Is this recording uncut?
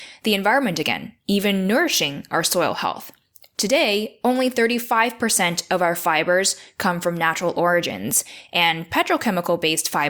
yes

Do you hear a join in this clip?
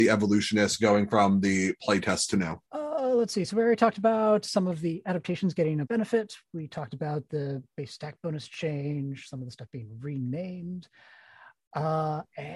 yes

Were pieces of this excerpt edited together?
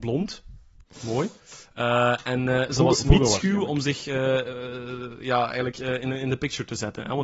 no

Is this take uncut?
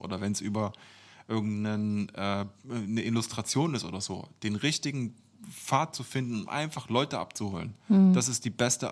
yes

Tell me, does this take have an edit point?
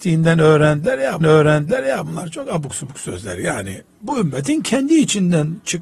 yes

